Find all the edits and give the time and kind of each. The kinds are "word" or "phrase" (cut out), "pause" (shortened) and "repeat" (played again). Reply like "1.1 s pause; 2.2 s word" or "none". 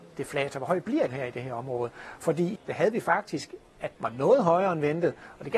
1.1 s word; 2.5 s word; 3.9 s phrase